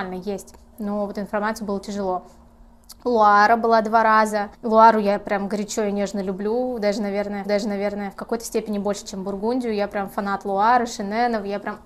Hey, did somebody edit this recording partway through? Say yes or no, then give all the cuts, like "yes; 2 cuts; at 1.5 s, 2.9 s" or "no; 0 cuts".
yes; 2 cuts; at 4.5 s, 7.4 s